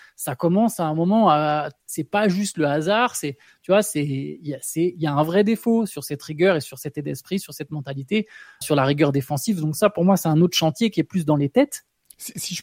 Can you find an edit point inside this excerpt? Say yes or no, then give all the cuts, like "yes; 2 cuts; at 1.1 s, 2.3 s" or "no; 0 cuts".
yes; 2 cuts; at 1.8 s, 8.6 s